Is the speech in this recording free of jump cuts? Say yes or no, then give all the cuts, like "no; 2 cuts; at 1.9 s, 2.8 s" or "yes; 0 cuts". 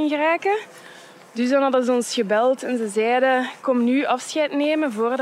yes; 0 cuts